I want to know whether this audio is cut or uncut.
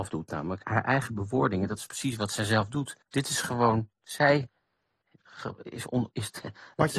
cut